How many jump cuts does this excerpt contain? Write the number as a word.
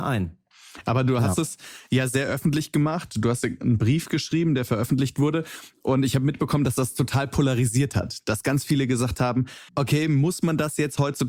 one